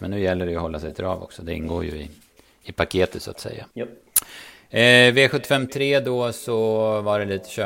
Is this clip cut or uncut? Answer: cut